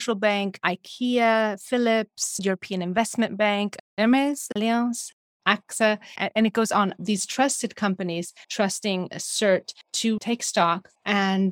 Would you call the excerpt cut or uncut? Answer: cut